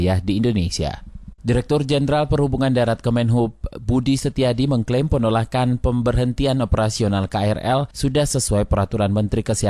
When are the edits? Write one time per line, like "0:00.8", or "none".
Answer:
0:01.4
0:07.9